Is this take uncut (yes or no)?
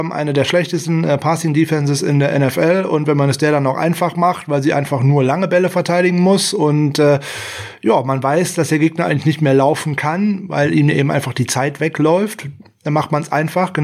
yes